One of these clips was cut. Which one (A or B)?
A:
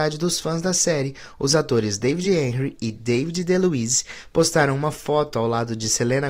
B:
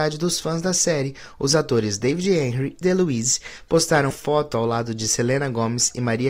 B